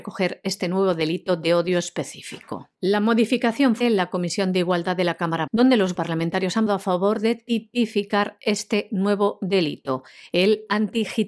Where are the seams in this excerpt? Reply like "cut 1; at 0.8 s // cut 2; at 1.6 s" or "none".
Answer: cut 1; at 2.7 s // cut 2; at 3.8 s // cut 3; at 5.5 s // cut 4; at 5.9 s // cut 5; at 6.7 s